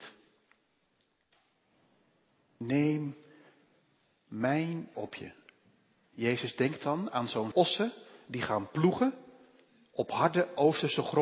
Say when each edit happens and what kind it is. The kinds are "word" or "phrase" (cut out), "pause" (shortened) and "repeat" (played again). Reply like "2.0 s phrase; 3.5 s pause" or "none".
4.9 s word; 7.5 s word